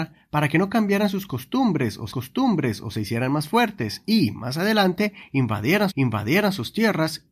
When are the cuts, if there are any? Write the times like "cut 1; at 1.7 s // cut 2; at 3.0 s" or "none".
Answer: cut 1; at 2.1 s // cut 2; at 5.9 s